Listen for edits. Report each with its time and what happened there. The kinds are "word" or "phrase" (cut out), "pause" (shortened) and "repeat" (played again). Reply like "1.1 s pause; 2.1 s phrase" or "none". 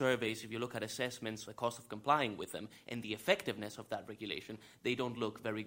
1.5 s word